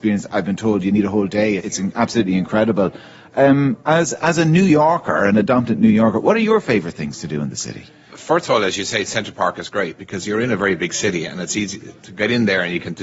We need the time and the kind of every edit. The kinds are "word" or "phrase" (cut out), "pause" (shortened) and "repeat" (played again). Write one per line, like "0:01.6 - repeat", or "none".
0:01.6 - word
0:08.1 - word